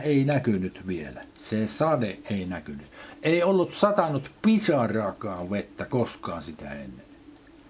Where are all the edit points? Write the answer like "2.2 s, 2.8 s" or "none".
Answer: 1.3 s